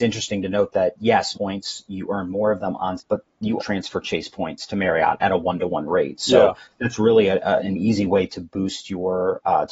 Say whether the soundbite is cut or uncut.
cut